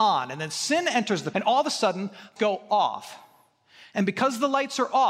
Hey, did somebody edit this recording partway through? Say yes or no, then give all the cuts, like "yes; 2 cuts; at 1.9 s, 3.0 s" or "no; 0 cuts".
yes; 2 cuts; at 1.3 s, 2.4 s